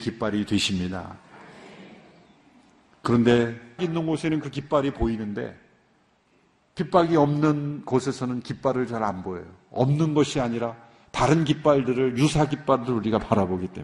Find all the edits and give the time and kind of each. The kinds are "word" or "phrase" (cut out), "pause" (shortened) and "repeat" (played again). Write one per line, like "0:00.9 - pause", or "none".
0:03.8 - word